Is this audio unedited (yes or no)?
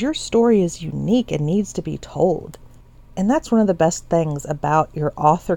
yes